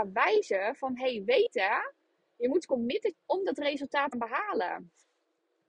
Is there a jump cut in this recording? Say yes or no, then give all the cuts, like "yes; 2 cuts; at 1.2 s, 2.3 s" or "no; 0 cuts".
yes; 2 cuts; at 3.1 s, 4.1 s